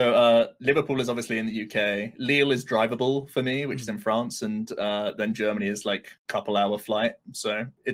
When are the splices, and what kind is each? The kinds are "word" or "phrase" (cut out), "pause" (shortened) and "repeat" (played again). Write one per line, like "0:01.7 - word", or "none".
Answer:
0:06.2 - pause